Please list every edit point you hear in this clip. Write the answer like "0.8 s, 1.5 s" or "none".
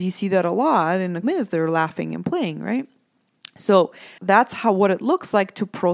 1.2 s, 4.2 s